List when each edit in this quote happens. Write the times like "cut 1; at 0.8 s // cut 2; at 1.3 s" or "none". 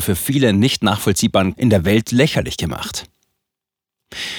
cut 1; at 1.5 s

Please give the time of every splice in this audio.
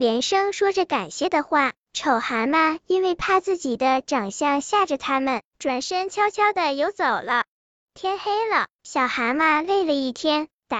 cut 1; at 7.8 s

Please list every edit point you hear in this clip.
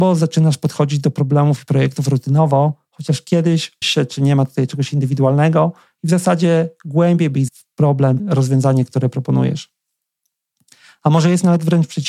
cut 1; at 3.8 s // cut 2; at 7.5 s // cut 3; at 8.2 s

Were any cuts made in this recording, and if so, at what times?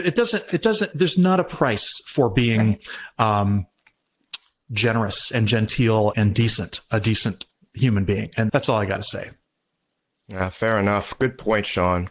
cut 1; at 0.9 s // cut 2; at 6.1 s // cut 3; at 8.5 s

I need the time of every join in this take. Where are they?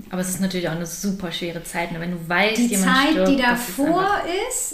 none

